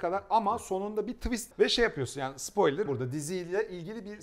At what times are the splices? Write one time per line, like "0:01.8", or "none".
0:01.5
0:02.9